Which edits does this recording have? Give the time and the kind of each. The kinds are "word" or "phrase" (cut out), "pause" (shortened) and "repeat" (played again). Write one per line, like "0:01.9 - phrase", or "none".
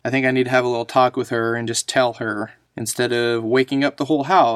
none